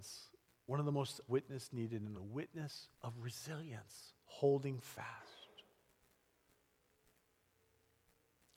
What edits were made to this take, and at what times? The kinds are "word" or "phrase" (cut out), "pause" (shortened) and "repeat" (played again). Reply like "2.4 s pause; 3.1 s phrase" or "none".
1.3 s phrase; 2.1 s phrase; 2.9 s pause; 4.2 s pause